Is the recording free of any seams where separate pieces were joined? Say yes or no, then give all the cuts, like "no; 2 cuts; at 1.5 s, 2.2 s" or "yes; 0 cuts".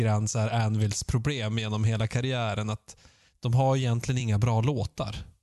yes; 0 cuts